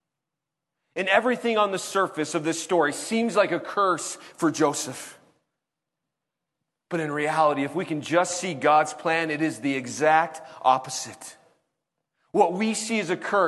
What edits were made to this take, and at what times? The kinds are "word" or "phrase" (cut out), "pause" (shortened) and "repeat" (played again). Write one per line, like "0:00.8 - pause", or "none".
none